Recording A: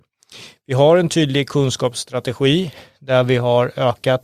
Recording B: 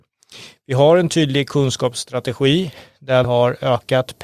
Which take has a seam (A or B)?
B